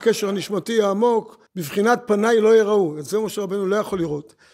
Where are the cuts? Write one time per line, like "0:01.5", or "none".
0:01.5